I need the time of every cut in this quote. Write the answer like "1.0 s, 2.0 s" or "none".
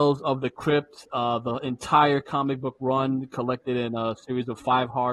none